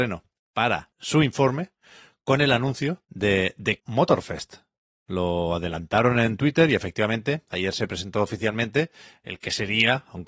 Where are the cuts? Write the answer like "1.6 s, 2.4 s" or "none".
0.9 s, 3.0 s, 3.8 s